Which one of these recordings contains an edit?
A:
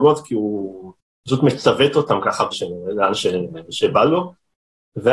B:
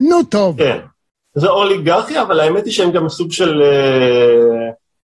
A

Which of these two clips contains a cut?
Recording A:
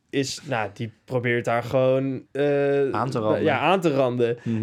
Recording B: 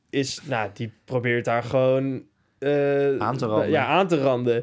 A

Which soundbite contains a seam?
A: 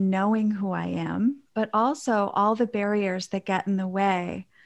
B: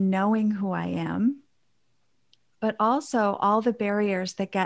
A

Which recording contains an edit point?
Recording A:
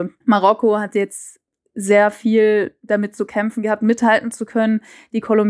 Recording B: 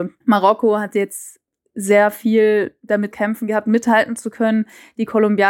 B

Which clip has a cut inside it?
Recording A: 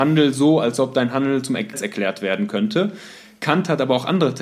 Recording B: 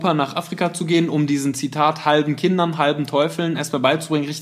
A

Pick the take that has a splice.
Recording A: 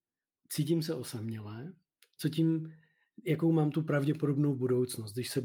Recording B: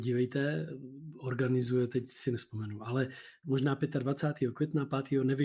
B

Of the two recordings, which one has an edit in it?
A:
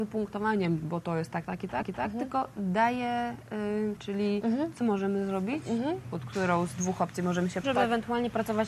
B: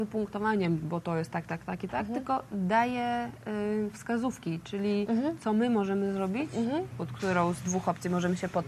A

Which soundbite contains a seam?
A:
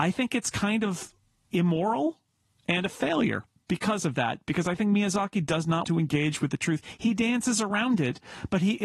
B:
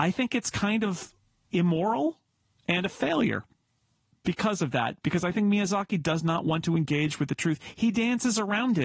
A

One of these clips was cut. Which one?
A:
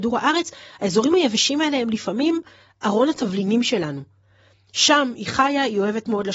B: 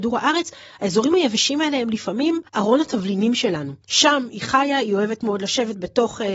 B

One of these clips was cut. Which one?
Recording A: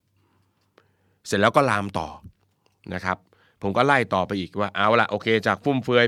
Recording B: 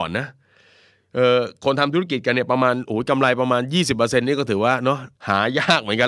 B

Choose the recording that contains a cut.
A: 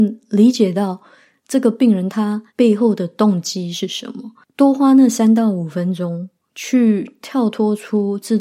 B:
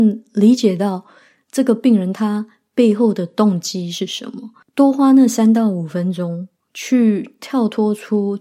A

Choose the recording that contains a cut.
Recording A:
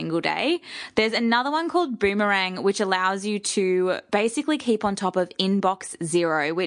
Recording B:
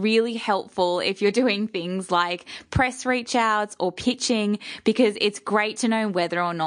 B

